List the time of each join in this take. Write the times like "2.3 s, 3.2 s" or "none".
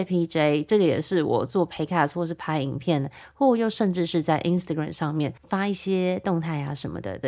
5.4 s